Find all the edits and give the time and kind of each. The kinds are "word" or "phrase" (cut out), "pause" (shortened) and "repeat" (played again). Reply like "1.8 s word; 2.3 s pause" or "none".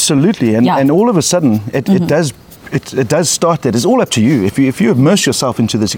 none

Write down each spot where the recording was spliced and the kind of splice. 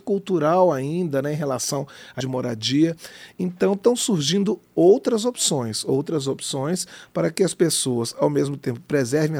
2.2 s phrase

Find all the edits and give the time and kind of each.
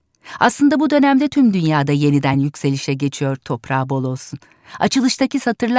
none

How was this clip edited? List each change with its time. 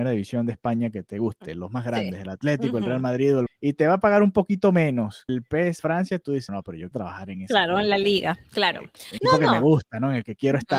3.5 s word; 5.3 s word; 5.8 s word; 6.5 s word; 6.9 s word; 9.2 s word

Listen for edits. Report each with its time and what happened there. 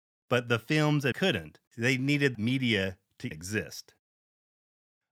1.1 s word; 1.7 s pause; 2.3 s word; 3.3 s word

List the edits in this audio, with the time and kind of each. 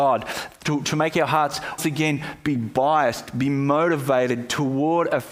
1.8 s word

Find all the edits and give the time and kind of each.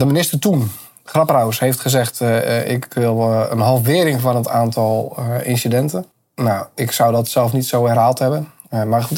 6.1 s pause

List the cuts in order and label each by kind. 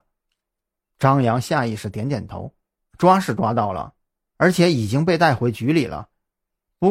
2.6 s pause

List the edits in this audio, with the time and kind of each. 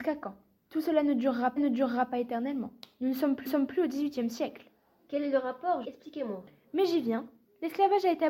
1.6 s repeat; 3.5 s repeat; 5.8 s phrase

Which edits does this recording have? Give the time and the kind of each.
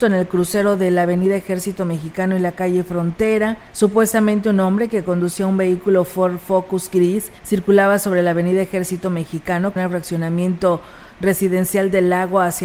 3.7 s pause; 7.4 s pause; 9.8 s phrase

